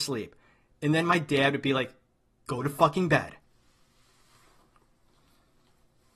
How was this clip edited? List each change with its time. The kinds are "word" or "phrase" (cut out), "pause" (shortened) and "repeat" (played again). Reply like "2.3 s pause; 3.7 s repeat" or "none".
none